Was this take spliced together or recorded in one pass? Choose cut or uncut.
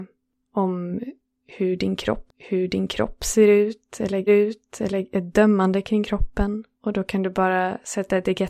cut